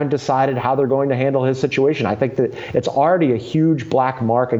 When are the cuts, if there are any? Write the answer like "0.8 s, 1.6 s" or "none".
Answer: none